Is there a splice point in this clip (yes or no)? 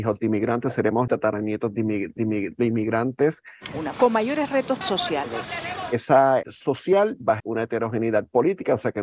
yes